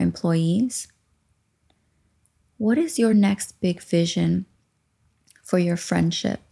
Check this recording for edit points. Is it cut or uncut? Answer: uncut